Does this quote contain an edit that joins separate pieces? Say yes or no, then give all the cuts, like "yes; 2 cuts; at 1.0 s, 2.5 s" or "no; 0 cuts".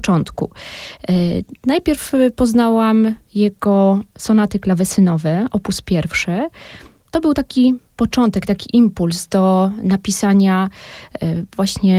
no; 0 cuts